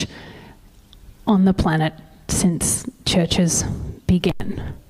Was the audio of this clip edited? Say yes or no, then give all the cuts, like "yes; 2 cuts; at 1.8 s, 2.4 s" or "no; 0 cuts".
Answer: no; 0 cuts